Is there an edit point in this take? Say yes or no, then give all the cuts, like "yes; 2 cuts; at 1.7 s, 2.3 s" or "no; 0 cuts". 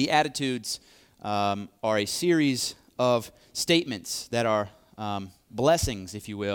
no; 0 cuts